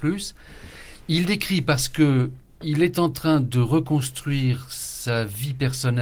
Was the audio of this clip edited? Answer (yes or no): no